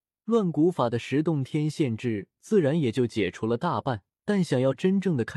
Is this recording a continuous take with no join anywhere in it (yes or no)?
no